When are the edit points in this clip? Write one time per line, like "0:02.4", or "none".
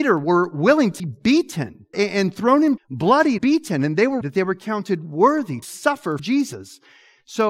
0:01.0
0:01.9
0:02.8
0:03.4
0:04.2
0:05.6
0:06.2